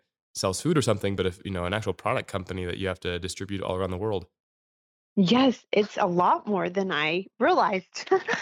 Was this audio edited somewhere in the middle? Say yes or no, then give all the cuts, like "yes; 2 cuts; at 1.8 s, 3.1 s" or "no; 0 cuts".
no; 0 cuts